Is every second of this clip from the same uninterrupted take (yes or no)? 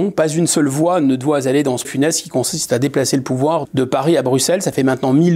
no